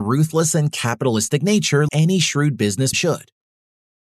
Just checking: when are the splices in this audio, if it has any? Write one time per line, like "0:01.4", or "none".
0:01.9
0:02.9

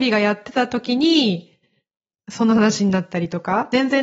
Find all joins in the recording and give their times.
none

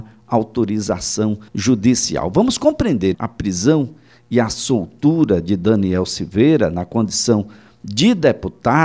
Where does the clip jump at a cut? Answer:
0:01.5
0:03.1

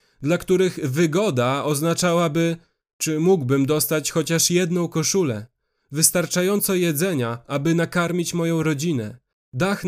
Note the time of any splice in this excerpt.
none

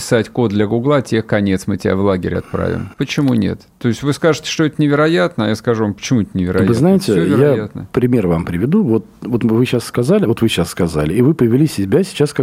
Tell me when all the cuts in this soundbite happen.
0:02.9

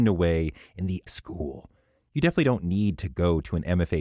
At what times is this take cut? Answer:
0:01.1

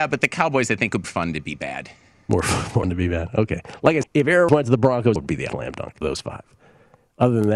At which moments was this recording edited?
0:01.0
0:02.8
0:04.0
0:04.5
0:05.2
0:05.5
0:06.0

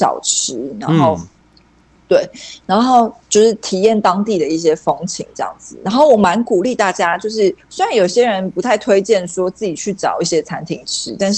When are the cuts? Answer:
0:03.2

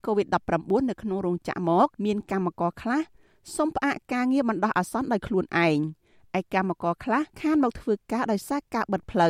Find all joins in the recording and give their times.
0:01.9
0:07.3

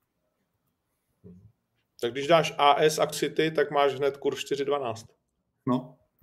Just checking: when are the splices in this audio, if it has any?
0:03.1

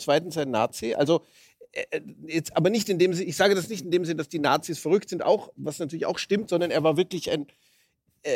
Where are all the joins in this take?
none

